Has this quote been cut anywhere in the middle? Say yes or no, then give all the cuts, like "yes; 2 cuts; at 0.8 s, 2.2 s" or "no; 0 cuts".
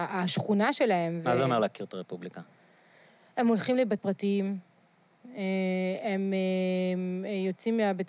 yes; 1 cut; at 4.0 s